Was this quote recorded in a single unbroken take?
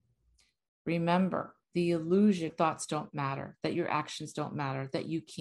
no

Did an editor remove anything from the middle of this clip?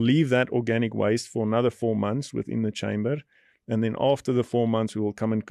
no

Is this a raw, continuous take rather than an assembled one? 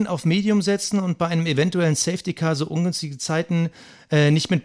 yes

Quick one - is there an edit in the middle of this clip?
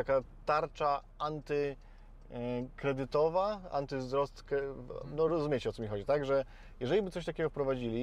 no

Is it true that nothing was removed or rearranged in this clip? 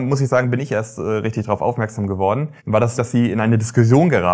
no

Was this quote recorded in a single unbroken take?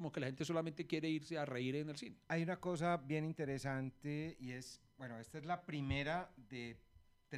no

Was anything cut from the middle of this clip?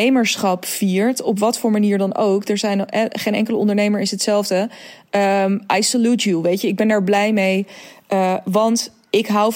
no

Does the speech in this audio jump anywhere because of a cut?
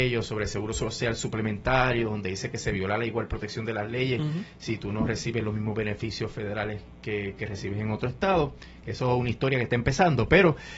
no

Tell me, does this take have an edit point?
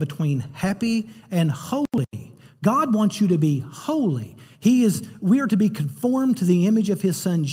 no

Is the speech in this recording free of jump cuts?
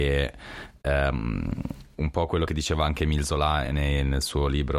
yes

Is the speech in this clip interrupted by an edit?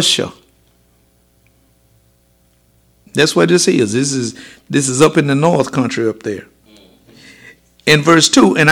no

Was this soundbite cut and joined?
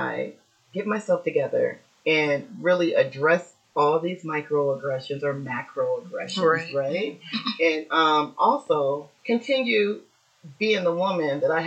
yes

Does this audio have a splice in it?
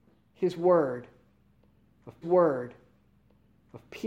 yes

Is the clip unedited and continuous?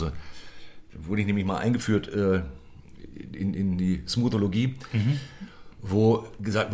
yes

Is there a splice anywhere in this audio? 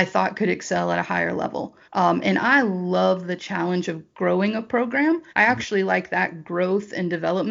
yes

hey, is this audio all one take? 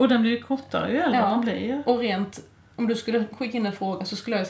yes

